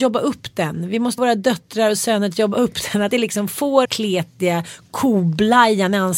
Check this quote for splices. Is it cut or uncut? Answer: cut